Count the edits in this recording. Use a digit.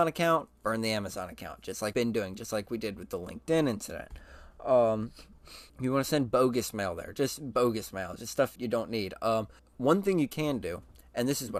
4